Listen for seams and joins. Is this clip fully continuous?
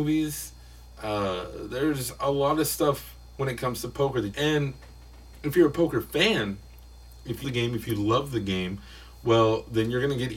no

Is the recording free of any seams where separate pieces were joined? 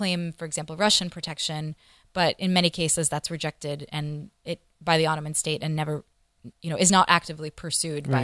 no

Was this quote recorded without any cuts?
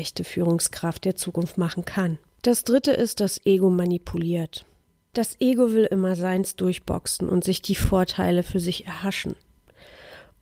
yes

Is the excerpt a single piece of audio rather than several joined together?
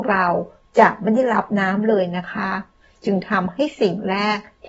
yes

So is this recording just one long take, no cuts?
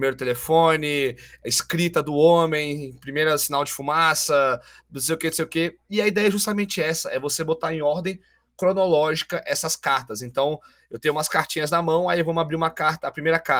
yes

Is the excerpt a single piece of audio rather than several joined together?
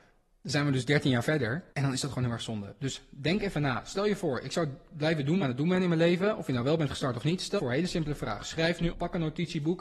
no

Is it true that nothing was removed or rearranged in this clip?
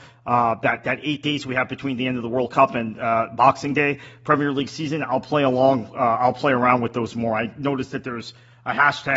yes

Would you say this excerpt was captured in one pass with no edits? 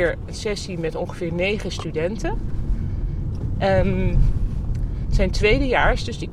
yes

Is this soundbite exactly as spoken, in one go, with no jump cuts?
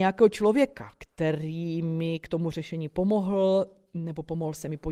yes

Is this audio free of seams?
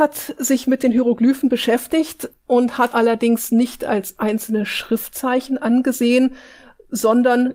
no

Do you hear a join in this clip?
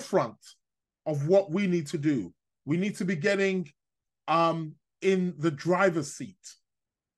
no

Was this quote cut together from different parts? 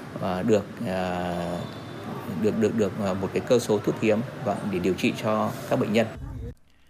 no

